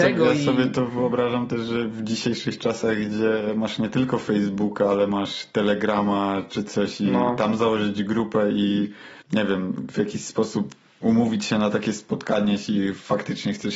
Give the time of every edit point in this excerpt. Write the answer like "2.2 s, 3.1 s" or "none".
9.2 s